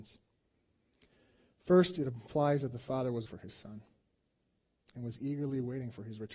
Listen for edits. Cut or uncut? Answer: cut